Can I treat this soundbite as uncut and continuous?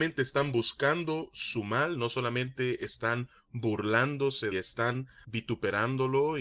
no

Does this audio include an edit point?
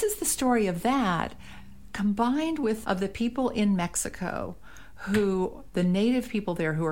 yes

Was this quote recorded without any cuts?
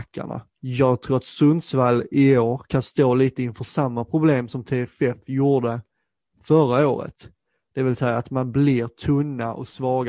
yes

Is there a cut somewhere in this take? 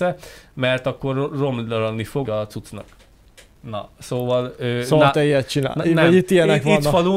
yes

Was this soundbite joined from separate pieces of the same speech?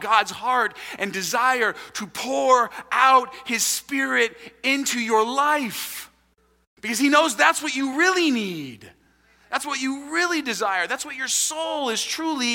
no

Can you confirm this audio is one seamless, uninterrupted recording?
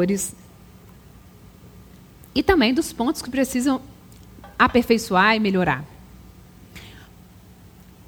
yes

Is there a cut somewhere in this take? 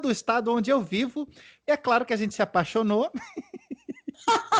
no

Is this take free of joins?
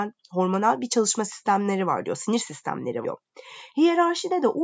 no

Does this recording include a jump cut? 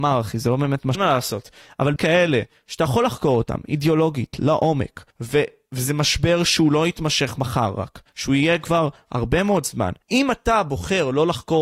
yes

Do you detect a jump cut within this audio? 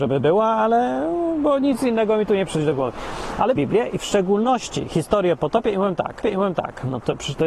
yes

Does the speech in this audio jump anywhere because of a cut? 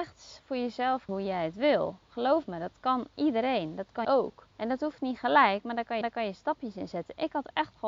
yes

